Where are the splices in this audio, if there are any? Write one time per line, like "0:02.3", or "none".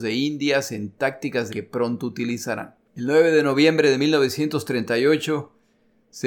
0:01.5
0:02.8